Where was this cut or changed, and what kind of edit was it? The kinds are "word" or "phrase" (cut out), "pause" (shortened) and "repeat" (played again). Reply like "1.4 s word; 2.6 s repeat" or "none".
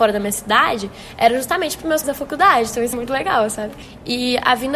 2.0 s word; 2.9 s word